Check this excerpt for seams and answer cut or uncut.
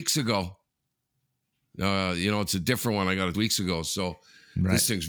cut